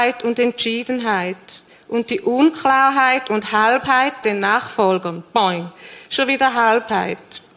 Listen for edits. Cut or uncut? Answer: cut